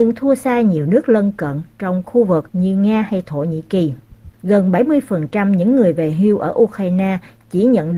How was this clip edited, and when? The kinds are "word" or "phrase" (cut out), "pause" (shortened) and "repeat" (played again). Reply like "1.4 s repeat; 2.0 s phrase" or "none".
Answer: 2.5 s pause; 4.3 s pause